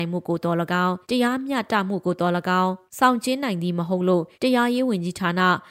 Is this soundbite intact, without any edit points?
no; 3 cuts; at 1.0 s, 2.9 s, 4.3 s

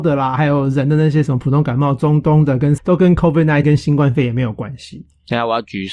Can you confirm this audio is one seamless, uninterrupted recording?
no; 2 cuts; at 2.8 s, 3.6 s

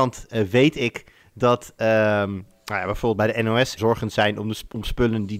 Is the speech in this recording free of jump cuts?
no; 2 cuts; at 1.2 s, 3.8 s

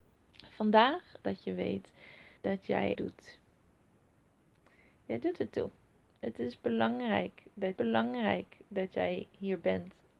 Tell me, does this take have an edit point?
yes; 4 cuts; at 1.2 s, 2.4 s, 2.9 s, 7.8 s

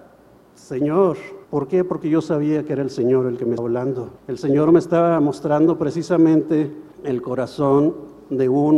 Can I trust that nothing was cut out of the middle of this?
no; 4 cuts; at 1.4 s, 3.6 s, 4.2 s, 6.9 s

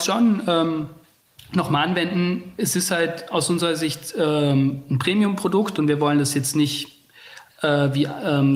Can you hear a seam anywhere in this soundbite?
no; 0 cuts

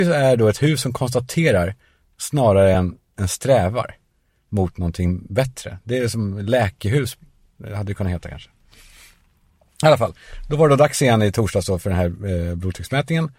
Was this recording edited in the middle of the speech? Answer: no; 0 cuts

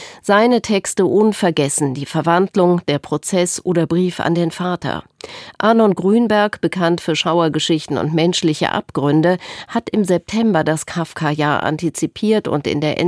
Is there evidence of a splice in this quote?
no; 0 cuts

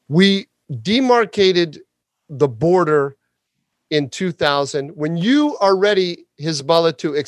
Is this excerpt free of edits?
yes; 0 cuts

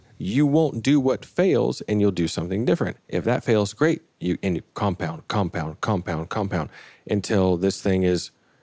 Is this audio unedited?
yes; 0 cuts

